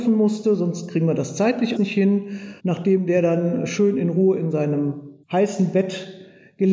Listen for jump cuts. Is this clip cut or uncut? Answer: cut